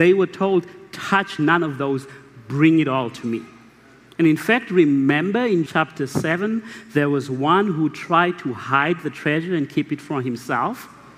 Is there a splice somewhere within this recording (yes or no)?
yes